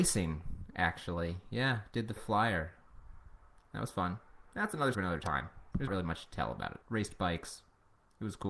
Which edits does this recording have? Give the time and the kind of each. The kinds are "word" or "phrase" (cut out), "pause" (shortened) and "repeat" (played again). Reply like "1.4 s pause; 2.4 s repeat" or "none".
2.2 s word; 4.9 s word; 5.9 s word; 6.8 s pause